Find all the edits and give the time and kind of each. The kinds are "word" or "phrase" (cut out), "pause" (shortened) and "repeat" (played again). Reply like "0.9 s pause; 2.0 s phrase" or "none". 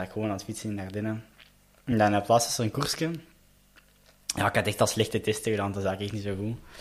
none